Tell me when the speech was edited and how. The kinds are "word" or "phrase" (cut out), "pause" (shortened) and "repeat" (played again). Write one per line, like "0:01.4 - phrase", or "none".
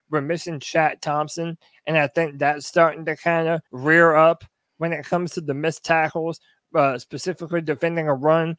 0:03.7 - pause